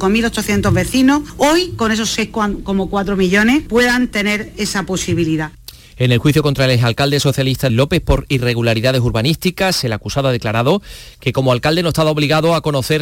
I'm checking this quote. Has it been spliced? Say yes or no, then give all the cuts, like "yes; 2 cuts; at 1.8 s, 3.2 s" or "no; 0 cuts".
yes; 1 cut; at 7.7 s